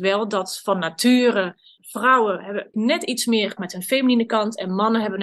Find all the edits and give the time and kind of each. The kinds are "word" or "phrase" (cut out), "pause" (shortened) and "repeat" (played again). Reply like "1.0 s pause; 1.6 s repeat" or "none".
1.8 s word; 2.7 s word; 3.6 s word